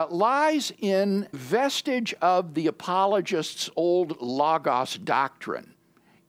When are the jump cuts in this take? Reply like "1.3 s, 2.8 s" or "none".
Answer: 1.3 s